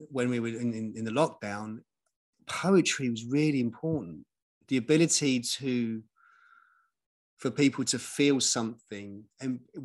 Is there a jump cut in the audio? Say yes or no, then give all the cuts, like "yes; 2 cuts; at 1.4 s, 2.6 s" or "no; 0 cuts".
no; 0 cuts